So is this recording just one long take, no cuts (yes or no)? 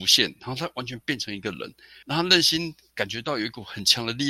no